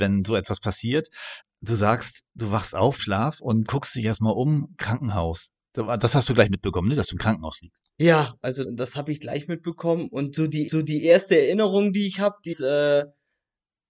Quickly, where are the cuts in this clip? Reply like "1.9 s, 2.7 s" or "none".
1.4 s, 3.0 s, 3.7 s, 7.9 s, 8.6 s, 10.7 s, 12.5 s